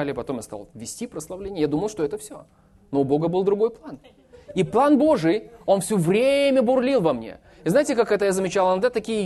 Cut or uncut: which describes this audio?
uncut